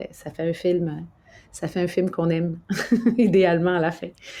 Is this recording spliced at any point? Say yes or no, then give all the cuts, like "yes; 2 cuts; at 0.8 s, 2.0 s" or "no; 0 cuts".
no; 0 cuts